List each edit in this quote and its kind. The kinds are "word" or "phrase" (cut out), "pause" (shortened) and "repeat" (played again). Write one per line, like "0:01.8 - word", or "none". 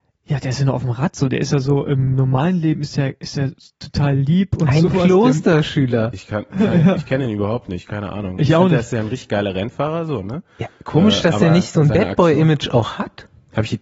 none